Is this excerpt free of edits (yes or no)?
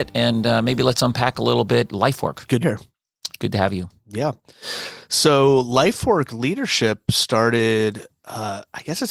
no